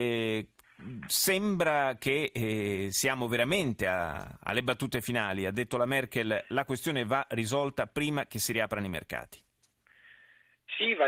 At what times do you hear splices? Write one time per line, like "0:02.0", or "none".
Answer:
none